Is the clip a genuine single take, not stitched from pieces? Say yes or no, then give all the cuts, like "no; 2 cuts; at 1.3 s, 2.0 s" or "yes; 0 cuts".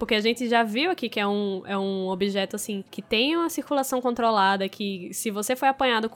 no; 1 cut; at 2.9 s